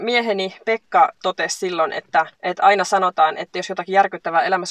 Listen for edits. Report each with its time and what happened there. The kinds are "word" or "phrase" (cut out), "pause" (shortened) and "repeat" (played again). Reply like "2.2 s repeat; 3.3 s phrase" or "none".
2.3 s pause